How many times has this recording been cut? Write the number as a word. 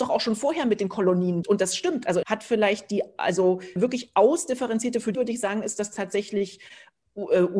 four